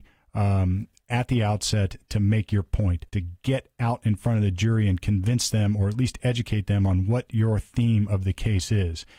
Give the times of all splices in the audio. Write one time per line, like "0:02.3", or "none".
0:03.1